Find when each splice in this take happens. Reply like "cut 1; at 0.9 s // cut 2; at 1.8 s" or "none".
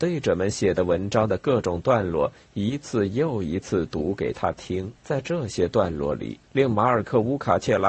cut 1; at 5.0 s // cut 2; at 6.4 s